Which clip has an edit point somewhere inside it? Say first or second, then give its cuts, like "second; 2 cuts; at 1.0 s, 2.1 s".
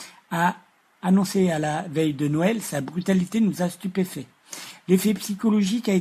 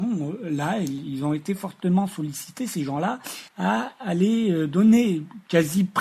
second; 1 cut; at 3.5 s